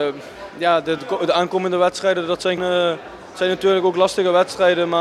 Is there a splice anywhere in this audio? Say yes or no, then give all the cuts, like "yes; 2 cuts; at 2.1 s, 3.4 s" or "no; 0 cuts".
yes; 1 cut; at 2.6 s